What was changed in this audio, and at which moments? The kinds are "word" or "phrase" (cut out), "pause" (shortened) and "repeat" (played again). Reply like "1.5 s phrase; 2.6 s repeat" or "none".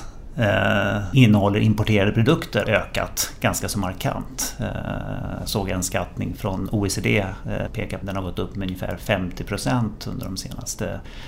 1.1 s word; 2.6 s word; 6.4 s word; 7.7 s phrase; 8.0 s word

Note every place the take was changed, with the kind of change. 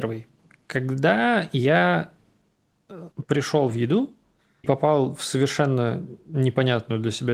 3.1 s pause; 4.6 s word

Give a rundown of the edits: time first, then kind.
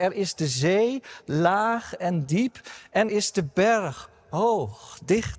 3.1 s word

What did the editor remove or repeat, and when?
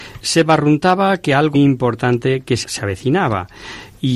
1.5 s word; 2.6 s word

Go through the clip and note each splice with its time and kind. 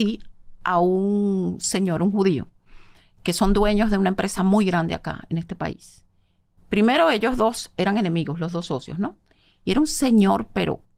none

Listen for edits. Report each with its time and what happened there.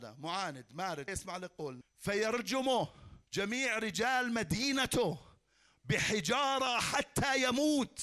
1.1 s word; 1.8 s phrase; 3.3 s pause

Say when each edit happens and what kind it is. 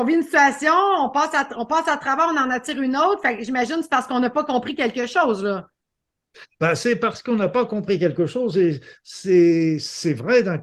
none

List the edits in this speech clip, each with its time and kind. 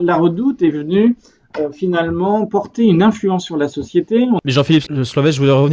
none

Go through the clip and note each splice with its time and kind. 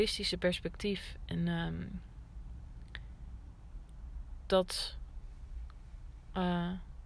4.5 s phrase

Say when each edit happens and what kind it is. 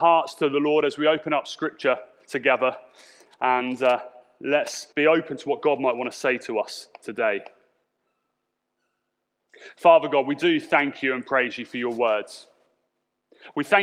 4.9 s pause

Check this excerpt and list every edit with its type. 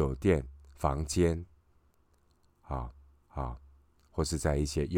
3.2 s repeat

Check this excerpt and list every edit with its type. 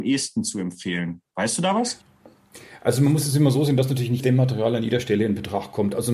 4.2 s word

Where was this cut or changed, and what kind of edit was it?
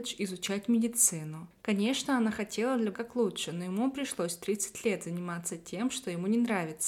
2.9 s word

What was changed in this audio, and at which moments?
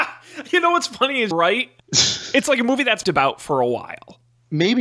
1.3 s word; 1.8 s pause; 3.0 s phrase

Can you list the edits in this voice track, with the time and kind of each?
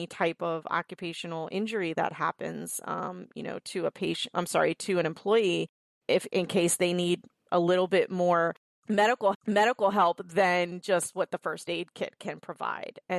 4.3 s word; 9.3 s repeat

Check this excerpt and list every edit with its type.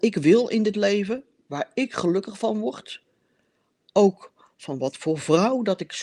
none

